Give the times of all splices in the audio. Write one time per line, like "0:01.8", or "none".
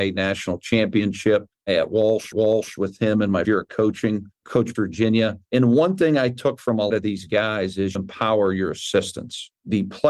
0:02.3
0:03.4
0:04.7
0:06.9
0:07.9

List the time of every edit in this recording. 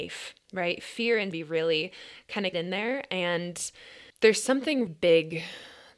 0:01.3
0:02.5
0:04.1
0:04.9

